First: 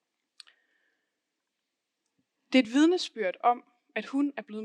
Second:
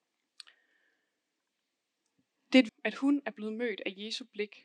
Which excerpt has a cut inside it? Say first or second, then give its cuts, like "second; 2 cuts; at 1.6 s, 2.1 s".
second; 1 cut; at 2.7 s